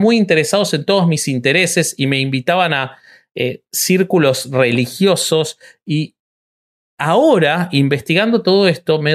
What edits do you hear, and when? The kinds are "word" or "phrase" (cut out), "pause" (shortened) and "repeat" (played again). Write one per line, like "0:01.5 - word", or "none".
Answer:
none